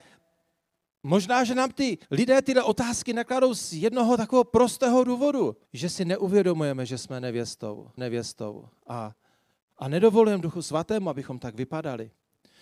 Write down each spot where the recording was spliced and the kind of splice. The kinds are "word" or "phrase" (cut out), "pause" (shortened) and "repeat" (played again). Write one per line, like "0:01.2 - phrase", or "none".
0:02.0 - pause
0:05.6 - pause
0:08.0 - repeat